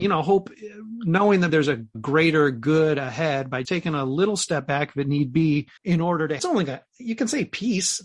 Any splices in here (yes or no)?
yes